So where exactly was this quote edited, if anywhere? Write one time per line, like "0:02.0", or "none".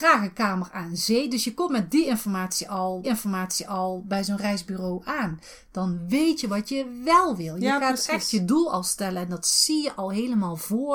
0:03.0